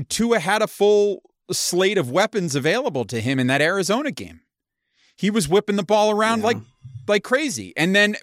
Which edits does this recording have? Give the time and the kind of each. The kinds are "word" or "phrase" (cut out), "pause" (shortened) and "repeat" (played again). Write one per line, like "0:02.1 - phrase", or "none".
none